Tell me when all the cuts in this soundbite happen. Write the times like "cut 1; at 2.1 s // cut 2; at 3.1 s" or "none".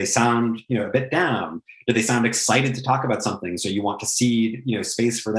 none